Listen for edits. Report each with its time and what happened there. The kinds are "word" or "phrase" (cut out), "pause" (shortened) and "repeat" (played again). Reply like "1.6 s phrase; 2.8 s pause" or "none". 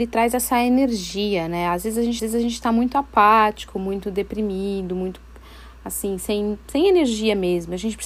2.2 s repeat